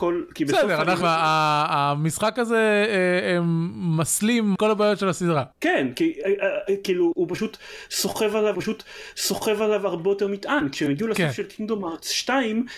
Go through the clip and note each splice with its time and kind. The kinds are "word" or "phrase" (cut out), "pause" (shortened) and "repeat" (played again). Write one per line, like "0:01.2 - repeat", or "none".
0:01.0 - word
0:04.5 - phrase
0:05.5 - pause
0:08.5 - repeat